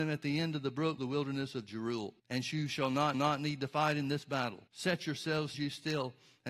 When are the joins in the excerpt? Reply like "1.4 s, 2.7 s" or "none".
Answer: 1.0 s, 2.2 s, 3.1 s, 4.7 s, 5.5 s